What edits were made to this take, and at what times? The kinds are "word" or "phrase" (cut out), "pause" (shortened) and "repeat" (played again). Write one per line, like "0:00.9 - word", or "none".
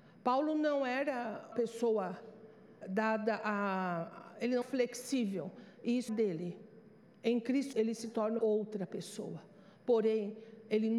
0:01.5 - word
0:02.8 - word
0:04.6 - word
0:06.1 - word
0:07.7 - word
0:08.4 - word